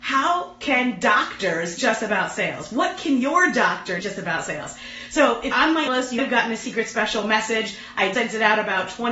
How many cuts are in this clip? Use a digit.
6